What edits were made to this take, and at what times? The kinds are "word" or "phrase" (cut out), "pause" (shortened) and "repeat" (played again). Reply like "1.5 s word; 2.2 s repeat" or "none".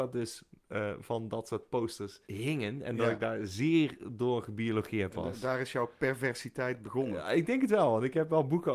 2.2 s pause